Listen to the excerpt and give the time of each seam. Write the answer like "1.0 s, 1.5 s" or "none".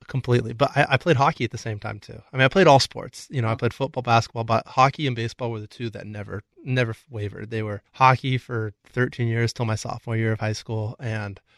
7.9 s